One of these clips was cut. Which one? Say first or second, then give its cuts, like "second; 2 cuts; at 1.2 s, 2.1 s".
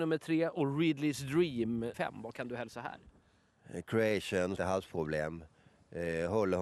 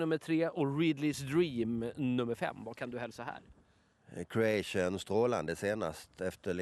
first; 2 cuts; at 1.9 s, 4.6 s